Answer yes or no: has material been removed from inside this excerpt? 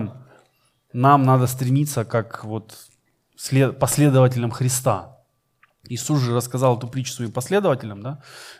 no